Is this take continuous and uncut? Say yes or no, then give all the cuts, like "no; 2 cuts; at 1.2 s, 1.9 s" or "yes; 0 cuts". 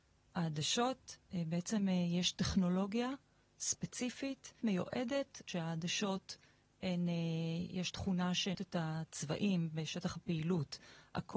no; 5 cuts; at 1.3 s, 4.6 s, 5.5 s, 7.9 s, 8.5 s